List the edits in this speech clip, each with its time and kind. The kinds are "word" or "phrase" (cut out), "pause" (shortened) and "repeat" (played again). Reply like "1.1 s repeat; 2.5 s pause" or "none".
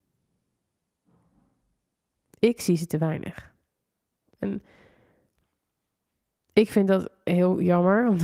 none